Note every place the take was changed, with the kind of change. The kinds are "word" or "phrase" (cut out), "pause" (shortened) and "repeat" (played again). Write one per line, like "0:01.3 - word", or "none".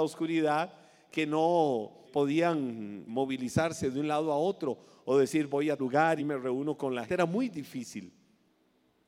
0:02.0 - word
0:03.1 - word
0:05.8 - word
0:06.2 - word
0:07.1 - word